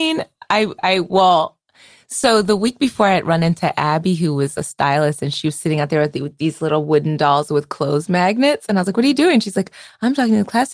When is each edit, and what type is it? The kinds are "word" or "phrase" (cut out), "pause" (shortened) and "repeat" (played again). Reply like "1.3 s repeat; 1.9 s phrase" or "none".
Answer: none

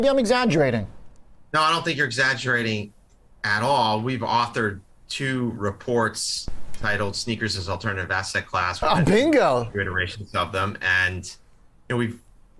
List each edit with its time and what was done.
none

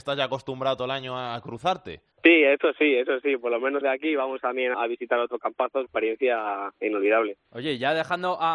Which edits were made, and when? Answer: 2.1 s pause; 3.8 s word; 4.7 s word; 5.9 s phrase; 7.5 s pause

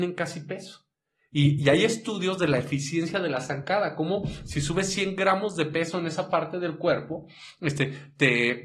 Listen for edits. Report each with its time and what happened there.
none

